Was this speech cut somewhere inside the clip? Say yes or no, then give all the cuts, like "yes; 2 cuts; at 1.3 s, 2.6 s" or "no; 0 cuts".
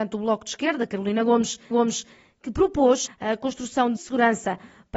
yes; 3 cuts; at 1.7 s, 3.1 s, 4.0 s